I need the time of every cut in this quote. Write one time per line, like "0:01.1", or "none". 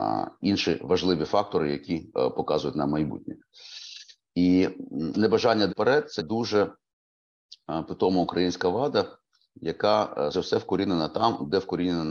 0:05.1
0:05.7
0:06.2
0:10.3